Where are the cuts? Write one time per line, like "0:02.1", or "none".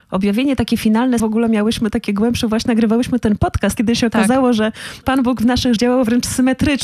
0:01.2
0:02.7
0:03.8
0:05.0
0:05.8

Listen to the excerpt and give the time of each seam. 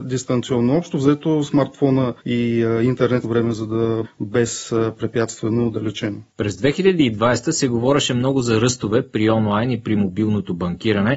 0:02.2
0:03.2
0:04.0
0:06.3

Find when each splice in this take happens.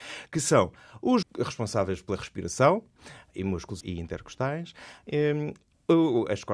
0:01.2
0:03.3
0:03.8

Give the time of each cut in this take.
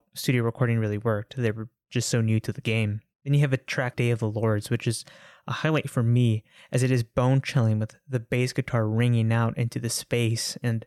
0:03.9

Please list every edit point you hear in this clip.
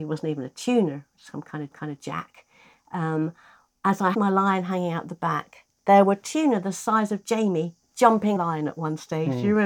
0:01.7
0:04.1
0:08.4

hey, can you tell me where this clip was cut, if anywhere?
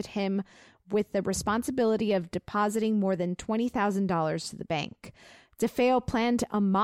none

